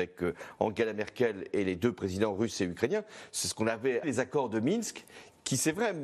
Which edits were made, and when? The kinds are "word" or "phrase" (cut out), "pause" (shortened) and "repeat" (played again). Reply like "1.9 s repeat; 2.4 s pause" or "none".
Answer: 4.0 s word